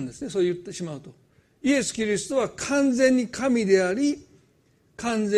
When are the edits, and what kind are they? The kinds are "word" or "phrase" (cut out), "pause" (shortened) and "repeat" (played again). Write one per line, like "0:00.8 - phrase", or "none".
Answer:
none